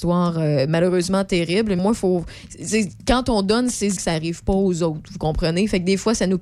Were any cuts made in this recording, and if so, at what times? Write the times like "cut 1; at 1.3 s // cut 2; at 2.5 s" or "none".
cut 1; at 1.8 s // cut 2; at 4.0 s